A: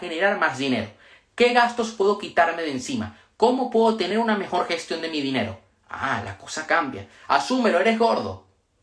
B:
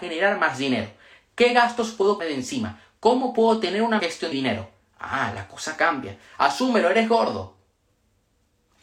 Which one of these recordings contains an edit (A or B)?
B